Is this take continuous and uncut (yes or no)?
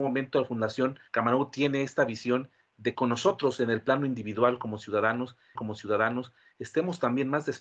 no